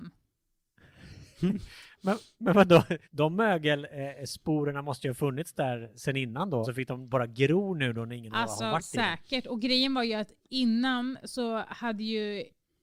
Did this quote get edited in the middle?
yes; 3 cuts; at 1.3 s, 3.0 s, 6.6 s

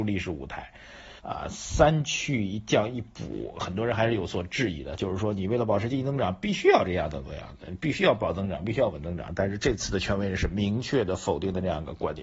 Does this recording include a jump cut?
yes; 1 cut; at 1.2 s

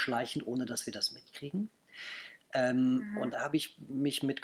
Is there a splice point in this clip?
yes; 1 cut; at 3.3 s

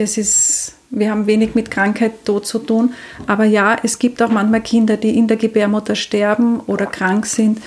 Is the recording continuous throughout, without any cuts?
yes; 0 cuts

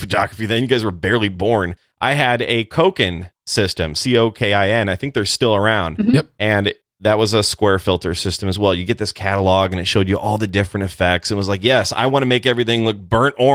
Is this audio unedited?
yes; 0 cuts

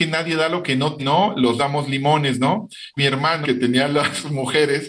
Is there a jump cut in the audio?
yes; 4 cuts; at 1.0 s, 1.6 s, 3.0 s, 3.4 s

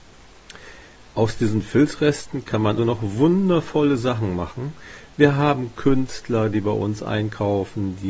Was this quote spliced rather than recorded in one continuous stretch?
yes; 1 cut; at 2.8 s

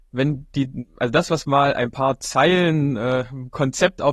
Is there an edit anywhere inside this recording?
no; 0 cuts

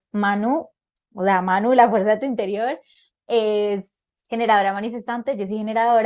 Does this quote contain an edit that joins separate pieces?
no; 0 cuts

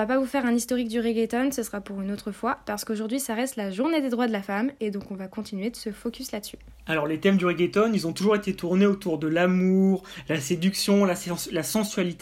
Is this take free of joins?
yes; 0 cuts

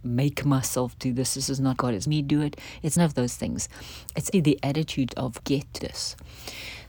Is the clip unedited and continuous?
no; 7 cuts; at 1.8 s, 2.1 s, 3.0 s, 4.3 s, 5.1 s, 5.4 s, 5.8 s

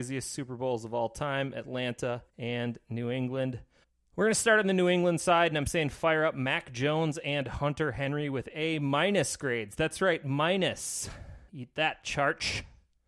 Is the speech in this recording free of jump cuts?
no; 3 cuts; at 2.3 s, 3.8 s, 11.5 s

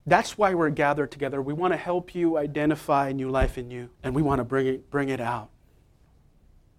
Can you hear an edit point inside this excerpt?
yes; 1 cut; at 3.9 s

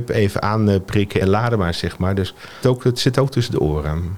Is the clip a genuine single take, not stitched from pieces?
no; 2 cuts; at 1.2 s, 2.6 s

